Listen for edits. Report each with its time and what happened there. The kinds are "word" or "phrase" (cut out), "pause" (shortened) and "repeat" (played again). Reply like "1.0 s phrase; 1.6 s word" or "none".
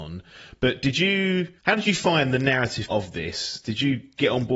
1.6 s pause; 2.9 s word